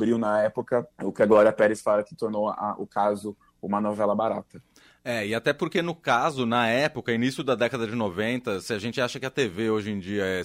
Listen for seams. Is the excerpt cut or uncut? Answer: cut